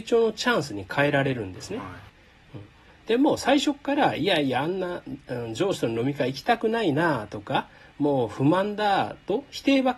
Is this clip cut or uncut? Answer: uncut